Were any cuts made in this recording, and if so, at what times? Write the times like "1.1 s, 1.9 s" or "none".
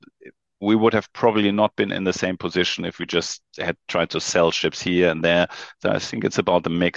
none